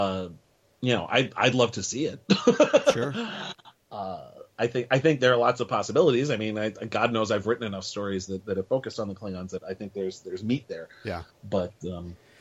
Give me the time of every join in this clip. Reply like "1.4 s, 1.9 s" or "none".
9.6 s